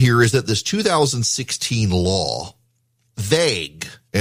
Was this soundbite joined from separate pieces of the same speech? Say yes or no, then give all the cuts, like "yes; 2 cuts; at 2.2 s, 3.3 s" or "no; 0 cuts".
yes; 1 cut; at 3.1 s